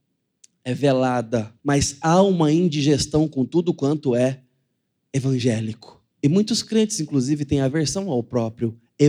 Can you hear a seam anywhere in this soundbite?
yes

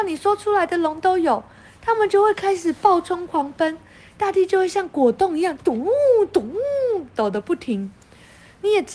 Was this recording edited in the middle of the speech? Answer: no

